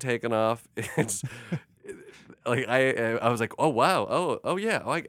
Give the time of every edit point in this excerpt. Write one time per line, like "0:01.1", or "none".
none